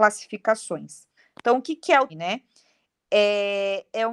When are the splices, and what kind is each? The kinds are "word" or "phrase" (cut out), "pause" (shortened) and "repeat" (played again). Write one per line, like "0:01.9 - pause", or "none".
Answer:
0:01.2 - pause
0:02.1 - word